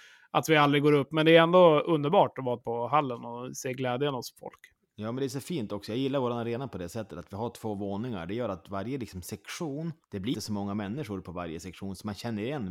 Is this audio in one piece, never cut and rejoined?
no; 3 cuts; at 2.6 s, 10.0 s, 10.3 s

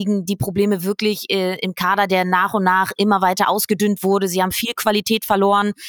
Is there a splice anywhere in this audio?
no; 0 cuts

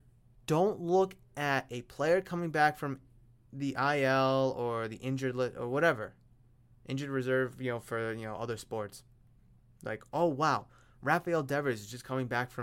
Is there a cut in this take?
no; 0 cuts

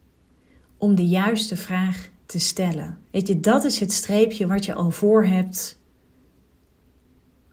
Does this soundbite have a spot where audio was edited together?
yes; 1 cut; at 3.0 s

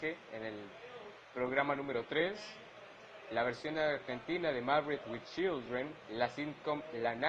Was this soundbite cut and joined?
no; 0 cuts

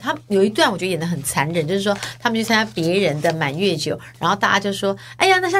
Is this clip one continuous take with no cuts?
yes; 0 cuts

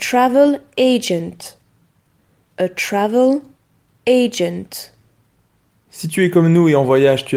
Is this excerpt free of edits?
yes; 0 cuts

